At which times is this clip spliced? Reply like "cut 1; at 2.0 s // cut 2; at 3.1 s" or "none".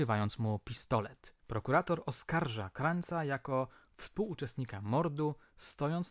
cut 1; at 1.4 s

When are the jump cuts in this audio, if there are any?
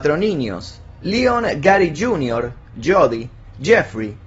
none

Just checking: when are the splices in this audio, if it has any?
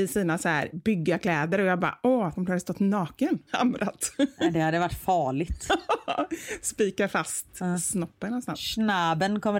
cut 1; at 2.4 s // cut 2; at 3.5 s

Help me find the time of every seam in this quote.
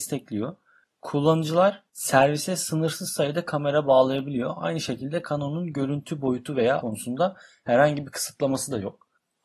cut 1; at 6.8 s

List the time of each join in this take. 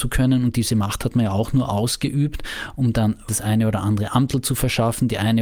cut 1; at 3.3 s

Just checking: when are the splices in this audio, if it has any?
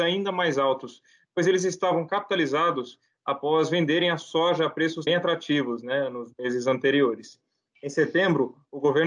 cut 1; at 5.1 s

